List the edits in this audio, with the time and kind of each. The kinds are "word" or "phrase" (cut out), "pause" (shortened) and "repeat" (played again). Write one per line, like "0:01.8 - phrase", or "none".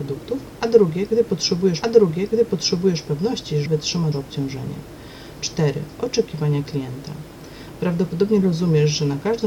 0:01.8 - repeat
0:03.7 - word
0:04.1 - word
0:08.4 - word